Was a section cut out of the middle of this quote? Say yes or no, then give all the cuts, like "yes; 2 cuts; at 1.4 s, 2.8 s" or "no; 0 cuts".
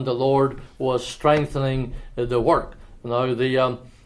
no; 0 cuts